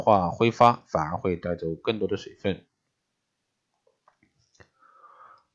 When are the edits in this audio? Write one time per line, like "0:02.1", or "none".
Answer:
none